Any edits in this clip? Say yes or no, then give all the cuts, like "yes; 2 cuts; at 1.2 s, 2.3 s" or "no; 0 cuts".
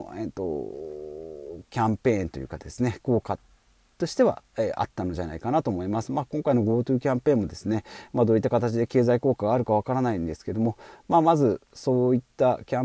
no; 0 cuts